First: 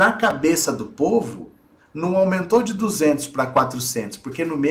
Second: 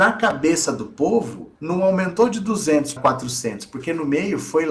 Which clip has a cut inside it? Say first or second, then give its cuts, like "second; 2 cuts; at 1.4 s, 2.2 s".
second; 2 cuts; at 1.6 s, 3.0 s